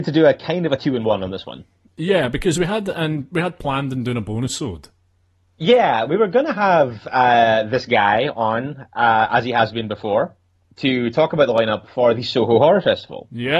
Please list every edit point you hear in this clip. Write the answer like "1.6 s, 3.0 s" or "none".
none